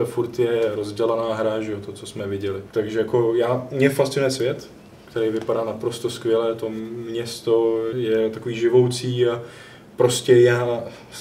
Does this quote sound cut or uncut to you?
cut